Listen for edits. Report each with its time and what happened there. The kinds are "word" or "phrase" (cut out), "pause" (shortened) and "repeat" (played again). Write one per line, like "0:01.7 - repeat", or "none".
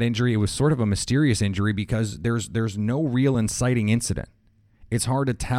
none